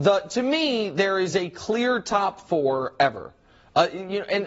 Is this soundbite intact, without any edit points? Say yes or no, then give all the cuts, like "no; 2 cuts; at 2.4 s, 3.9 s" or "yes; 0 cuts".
yes; 0 cuts